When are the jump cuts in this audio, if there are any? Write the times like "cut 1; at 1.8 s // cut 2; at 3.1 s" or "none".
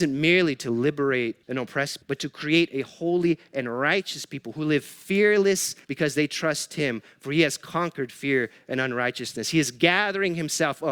cut 1; at 1.4 s // cut 2; at 2.0 s // cut 3; at 5.8 s